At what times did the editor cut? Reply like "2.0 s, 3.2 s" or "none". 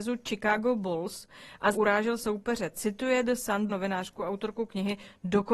1.7 s, 2.2 s, 3.7 s